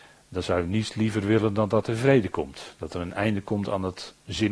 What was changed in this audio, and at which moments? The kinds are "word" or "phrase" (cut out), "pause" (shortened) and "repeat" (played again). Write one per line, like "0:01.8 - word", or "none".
none